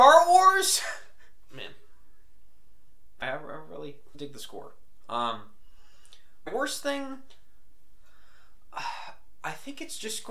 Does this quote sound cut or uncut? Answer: cut